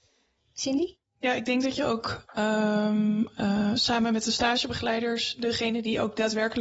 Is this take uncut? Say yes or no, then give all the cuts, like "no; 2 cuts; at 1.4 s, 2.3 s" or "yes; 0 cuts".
yes; 0 cuts